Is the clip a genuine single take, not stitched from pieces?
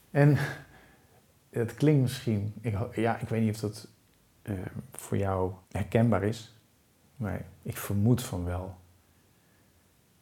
no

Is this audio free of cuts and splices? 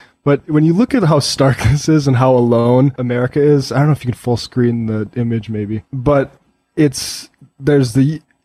yes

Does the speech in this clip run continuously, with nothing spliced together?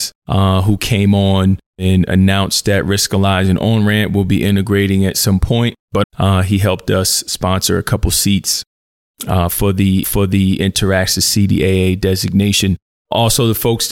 no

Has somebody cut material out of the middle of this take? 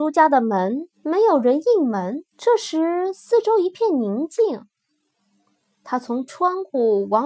yes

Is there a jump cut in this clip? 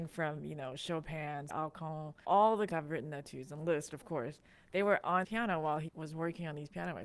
yes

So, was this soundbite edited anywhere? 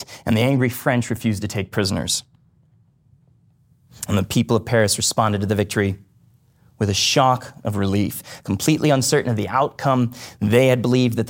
no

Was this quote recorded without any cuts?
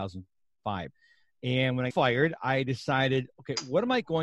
no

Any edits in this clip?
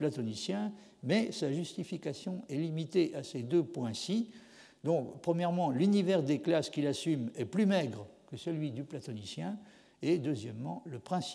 no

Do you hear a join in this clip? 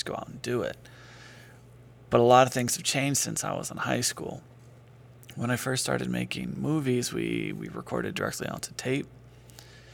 no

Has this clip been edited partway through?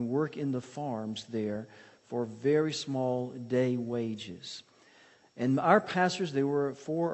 no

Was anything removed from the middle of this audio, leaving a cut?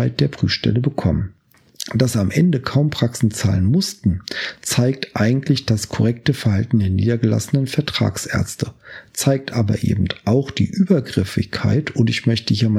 no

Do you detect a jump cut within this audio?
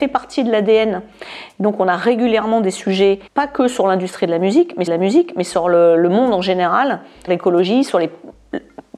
yes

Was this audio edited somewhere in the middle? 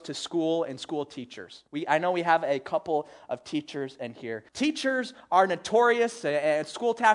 yes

